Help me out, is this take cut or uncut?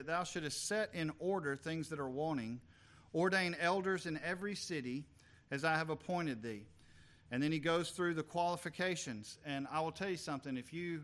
uncut